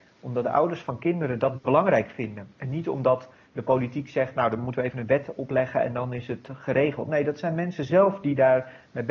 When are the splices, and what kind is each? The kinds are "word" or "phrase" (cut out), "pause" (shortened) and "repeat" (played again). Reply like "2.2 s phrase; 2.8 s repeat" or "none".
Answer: none